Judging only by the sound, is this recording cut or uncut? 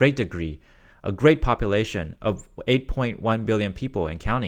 uncut